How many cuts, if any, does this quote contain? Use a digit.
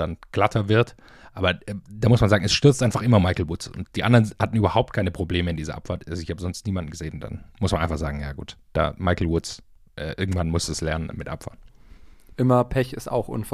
0